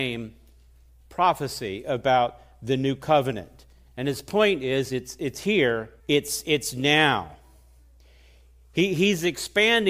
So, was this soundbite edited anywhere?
yes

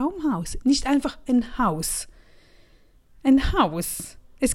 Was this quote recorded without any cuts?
yes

